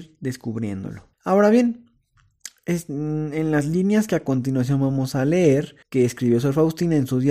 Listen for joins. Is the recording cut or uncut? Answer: cut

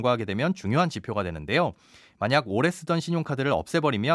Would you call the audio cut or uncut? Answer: uncut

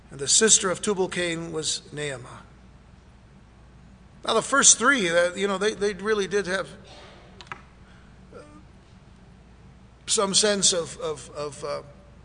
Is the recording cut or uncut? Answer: uncut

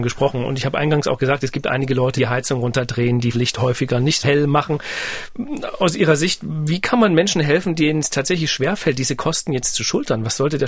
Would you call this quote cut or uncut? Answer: cut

